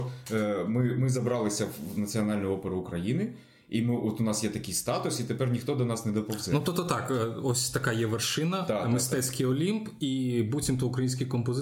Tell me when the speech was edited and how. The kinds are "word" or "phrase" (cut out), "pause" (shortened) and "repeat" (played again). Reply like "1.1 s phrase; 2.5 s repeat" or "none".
none